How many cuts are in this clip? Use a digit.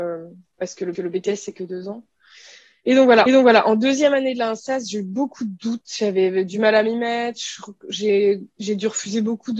2